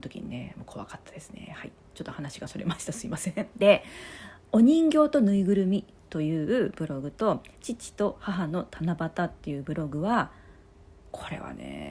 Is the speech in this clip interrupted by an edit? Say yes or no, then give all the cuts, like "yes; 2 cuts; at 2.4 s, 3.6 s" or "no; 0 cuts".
yes; 2 cuts; at 3.5 s, 7.5 s